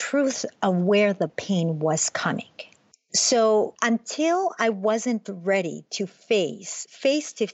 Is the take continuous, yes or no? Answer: yes